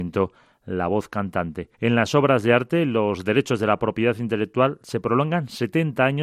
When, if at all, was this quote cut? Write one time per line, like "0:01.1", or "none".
0:01.7